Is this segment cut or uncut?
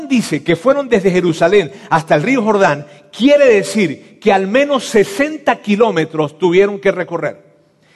uncut